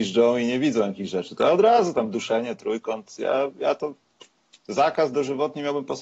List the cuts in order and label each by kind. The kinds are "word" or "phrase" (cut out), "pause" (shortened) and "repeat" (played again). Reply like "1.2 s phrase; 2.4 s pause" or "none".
none